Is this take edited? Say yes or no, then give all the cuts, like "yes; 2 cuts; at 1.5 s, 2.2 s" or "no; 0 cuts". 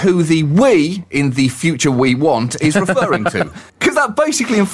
yes; 1 cut; at 3.7 s